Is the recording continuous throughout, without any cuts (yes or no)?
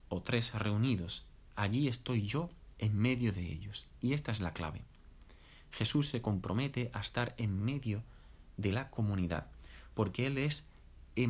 yes